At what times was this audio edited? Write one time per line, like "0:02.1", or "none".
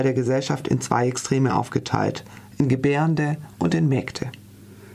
none